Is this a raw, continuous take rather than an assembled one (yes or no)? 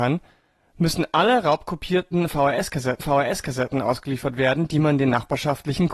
no